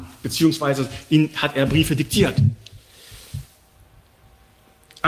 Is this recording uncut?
yes; 0 cuts

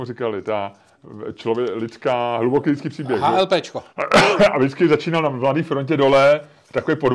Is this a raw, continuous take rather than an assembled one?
no; 1 cut; at 3.9 s

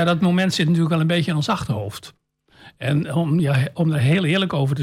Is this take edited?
no; 0 cuts

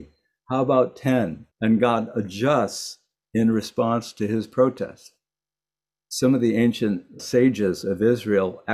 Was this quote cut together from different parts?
yes; 2 cuts; at 1.5 s, 7.2 s

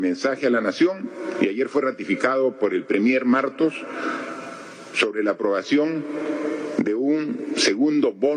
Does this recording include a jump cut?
no; 0 cuts

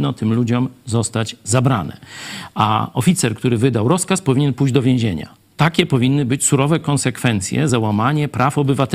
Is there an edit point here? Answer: no; 0 cuts

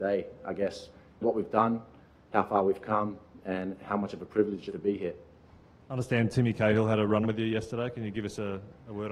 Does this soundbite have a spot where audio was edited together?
yes; 3 cuts; at 1.2 s, 4.7 s, 7.2 s

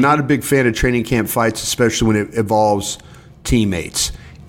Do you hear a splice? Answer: no; 0 cuts

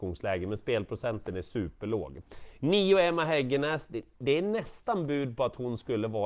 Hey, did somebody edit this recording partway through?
no; 0 cuts

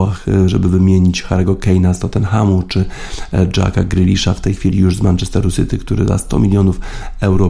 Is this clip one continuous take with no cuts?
yes; 0 cuts

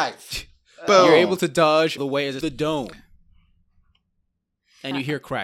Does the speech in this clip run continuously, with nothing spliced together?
no; 2 cuts; at 2.0 s, 2.4 s

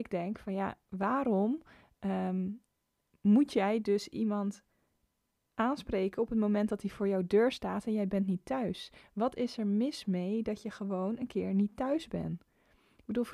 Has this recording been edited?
no; 0 cuts

